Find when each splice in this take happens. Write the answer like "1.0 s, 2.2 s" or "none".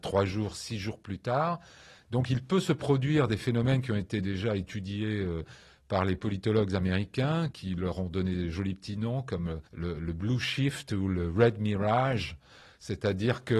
7.5 s, 9.7 s

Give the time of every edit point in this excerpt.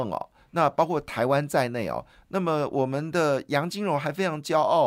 none

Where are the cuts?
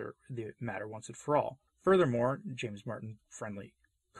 1.7 s

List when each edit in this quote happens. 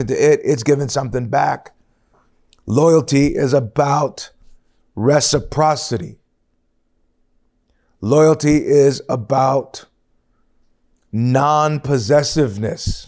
none

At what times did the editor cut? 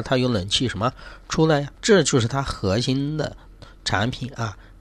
1.7 s

